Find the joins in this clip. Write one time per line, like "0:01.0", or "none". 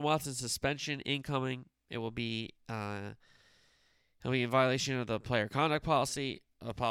0:02.6